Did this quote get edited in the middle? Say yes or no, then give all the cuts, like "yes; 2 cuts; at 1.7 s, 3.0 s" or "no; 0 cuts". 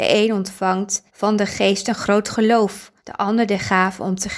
yes; 2 cuts; at 1.1 s, 3.0 s